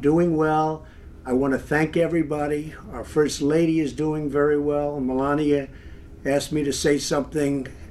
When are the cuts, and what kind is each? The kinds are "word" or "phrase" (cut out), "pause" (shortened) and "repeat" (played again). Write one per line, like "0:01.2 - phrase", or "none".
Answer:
none